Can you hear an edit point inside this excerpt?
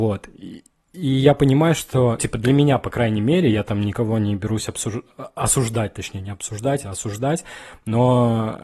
yes; 1 cut; at 2.2 s

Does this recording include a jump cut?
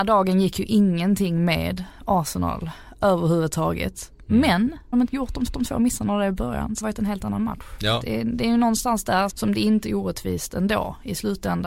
yes; 5 cuts; at 4.9 s, 5.5 s, 6.8 s, 9.3 s, 9.8 s

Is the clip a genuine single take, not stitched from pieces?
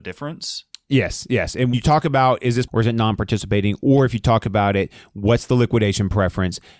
no; 2 cuts; at 1.7 s, 2.7 s

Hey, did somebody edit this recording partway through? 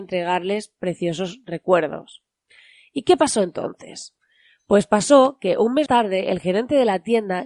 yes; 1 cut; at 5.9 s

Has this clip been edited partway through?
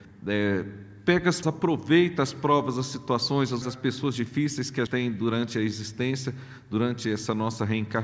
yes; 4 cuts; at 1.4 s, 3.6 s, 4.1 s, 4.9 s

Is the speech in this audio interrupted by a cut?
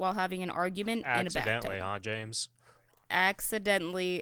no; 0 cuts

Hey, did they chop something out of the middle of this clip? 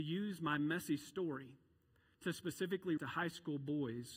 yes; 1 cut; at 3.0 s

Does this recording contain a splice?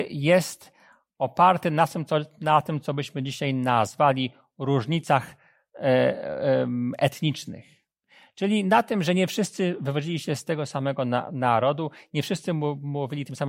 no; 0 cuts

